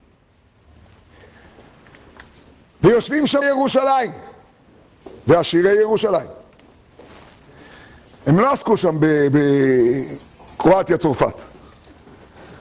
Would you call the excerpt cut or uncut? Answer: cut